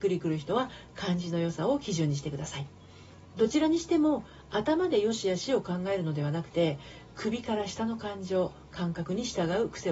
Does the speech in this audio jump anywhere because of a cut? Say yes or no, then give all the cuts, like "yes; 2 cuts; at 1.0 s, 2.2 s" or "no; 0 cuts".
yes; 1 cut; at 3.3 s